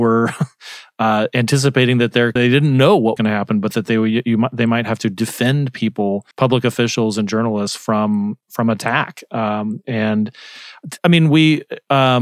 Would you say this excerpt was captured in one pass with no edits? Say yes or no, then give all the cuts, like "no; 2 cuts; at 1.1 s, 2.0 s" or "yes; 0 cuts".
no; 4 cuts; at 2.4 s, 3.2 s, 6.3 s, 11.0 s